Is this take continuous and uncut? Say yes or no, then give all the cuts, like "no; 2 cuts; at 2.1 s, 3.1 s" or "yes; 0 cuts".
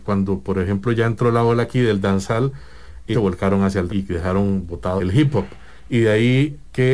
no; 3 cuts; at 3.1 s, 3.9 s, 5.0 s